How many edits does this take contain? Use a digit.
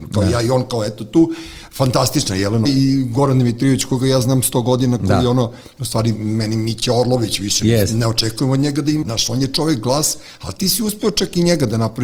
2